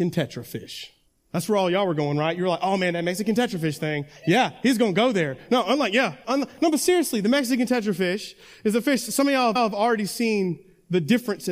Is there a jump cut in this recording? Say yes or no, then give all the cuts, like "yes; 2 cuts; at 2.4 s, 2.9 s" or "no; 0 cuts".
yes; 3 cuts; at 1.1 s, 6.2 s, 9.6 s